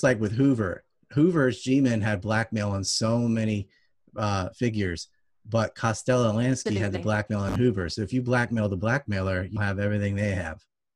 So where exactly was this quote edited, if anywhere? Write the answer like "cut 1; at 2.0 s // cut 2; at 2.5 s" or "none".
cut 1; at 9.6 s